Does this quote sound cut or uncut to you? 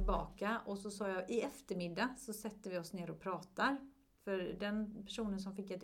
uncut